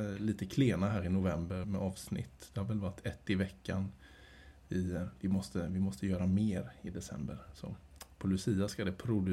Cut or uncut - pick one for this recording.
cut